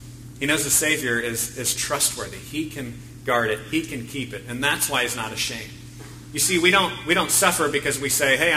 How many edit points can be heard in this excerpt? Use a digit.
0